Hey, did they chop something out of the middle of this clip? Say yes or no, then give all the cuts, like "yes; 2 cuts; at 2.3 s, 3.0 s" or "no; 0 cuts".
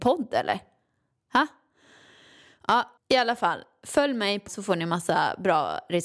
yes; 2 cuts; at 3.0 s, 4.5 s